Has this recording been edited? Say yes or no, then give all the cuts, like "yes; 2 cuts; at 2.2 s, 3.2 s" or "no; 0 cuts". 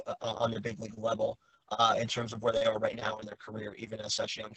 no; 0 cuts